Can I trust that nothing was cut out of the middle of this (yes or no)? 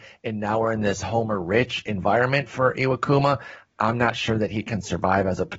yes